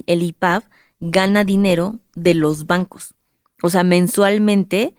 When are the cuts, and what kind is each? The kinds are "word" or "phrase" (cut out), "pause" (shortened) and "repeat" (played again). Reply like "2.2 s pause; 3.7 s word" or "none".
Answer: none